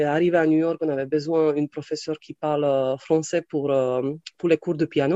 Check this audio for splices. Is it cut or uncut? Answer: uncut